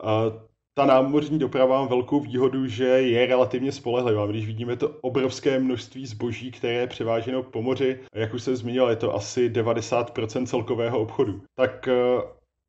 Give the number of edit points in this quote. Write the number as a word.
two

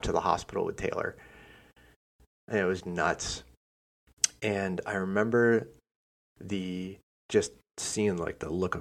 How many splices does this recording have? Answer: two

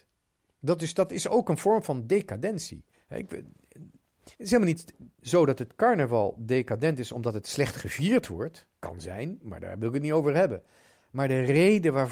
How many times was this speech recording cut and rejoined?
four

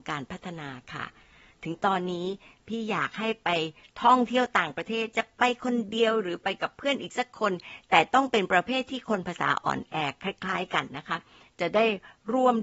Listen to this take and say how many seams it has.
zero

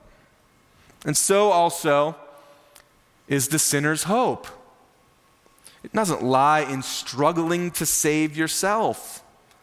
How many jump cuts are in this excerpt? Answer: zero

